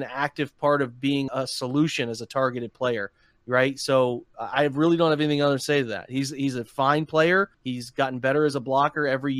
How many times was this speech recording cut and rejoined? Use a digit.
2